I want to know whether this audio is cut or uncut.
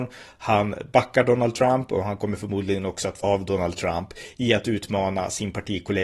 cut